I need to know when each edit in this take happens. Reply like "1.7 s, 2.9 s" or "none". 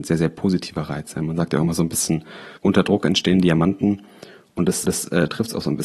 2.6 s, 4.9 s